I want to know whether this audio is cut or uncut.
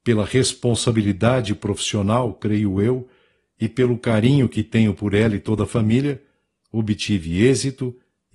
uncut